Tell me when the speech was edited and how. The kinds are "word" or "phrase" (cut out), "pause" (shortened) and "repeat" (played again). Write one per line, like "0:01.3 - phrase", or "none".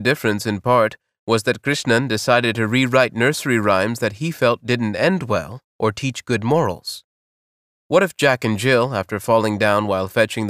none